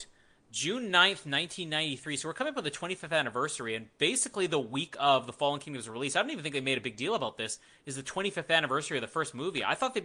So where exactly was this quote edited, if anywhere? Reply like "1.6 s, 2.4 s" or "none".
none